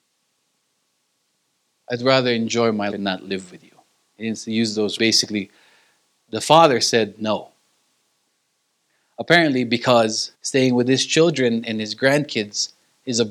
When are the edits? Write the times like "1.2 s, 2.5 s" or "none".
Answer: 2.9 s, 5.0 s, 10.3 s